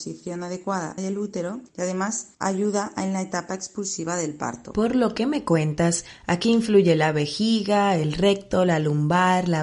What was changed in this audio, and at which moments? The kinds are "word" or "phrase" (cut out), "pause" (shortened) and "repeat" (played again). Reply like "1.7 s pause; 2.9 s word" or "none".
1.0 s phrase; 1.7 s pause; 2.3 s pause